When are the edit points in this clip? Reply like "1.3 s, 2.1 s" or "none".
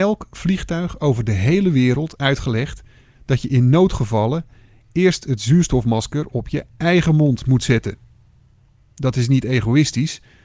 none